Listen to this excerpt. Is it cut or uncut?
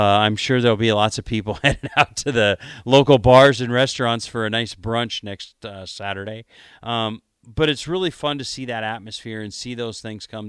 uncut